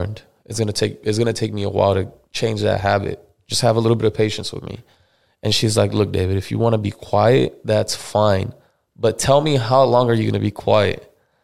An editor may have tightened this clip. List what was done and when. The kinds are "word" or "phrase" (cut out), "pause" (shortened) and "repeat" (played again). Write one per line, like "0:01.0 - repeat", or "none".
none